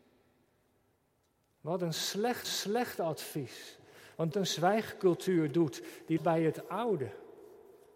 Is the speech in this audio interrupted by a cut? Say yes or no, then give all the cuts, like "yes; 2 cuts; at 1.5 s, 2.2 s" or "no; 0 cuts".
yes; 3 cuts; at 2.4 s, 4.3 s, 6.2 s